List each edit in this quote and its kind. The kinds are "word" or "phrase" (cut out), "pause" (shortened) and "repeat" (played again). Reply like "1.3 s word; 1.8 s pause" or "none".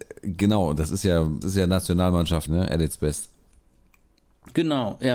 1.4 s word; 2.5 s word